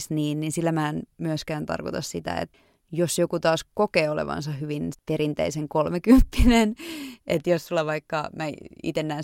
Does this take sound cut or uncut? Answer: cut